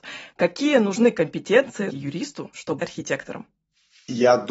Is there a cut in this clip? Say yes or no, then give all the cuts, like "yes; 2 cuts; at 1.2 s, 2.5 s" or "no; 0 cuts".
yes; 2 cuts; at 1.9 s, 2.8 s